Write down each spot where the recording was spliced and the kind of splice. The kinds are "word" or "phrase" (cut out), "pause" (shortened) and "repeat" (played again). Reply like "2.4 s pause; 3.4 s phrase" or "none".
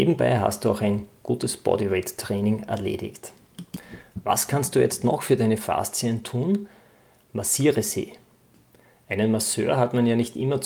none